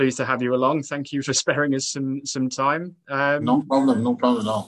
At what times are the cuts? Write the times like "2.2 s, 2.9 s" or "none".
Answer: 1.2 s